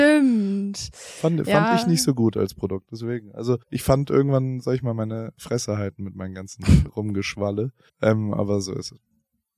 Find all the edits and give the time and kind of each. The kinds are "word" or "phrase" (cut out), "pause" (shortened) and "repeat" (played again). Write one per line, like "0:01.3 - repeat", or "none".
0:03.6 - pause
0:06.9 - word
0:07.9 - pause

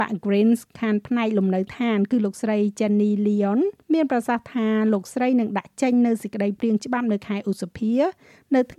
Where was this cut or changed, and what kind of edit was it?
0:03.8 - pause

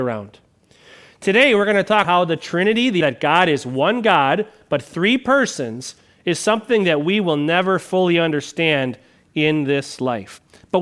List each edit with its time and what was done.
0:02.0 - word
0:03.0 - word

